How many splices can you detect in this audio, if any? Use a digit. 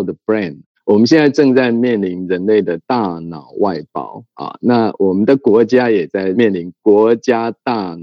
2